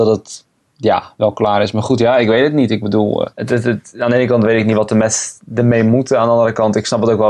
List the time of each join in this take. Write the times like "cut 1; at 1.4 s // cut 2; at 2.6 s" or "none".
cut 1; at 3.3 s